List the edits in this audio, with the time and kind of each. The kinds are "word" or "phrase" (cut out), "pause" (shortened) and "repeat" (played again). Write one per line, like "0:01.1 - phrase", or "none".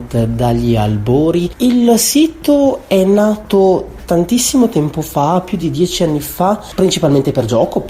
none